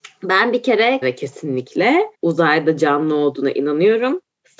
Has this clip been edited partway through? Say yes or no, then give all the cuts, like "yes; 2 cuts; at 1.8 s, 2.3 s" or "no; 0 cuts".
yes; 2 cuts; at 1.0 s, 2.1 s